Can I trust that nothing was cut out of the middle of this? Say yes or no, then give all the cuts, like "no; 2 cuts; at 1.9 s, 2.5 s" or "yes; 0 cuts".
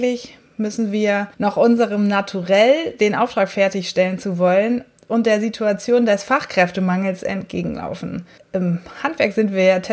no; 2 cuts; at 1.3 s, 8.4 s